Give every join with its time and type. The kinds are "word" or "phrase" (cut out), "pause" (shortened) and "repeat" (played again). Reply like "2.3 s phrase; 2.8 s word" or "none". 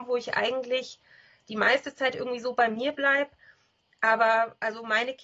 none